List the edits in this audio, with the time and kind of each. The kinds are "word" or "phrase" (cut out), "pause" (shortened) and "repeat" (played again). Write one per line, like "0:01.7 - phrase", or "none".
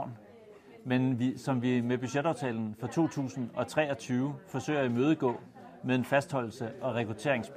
none